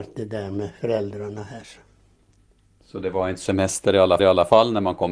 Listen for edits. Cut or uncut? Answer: cut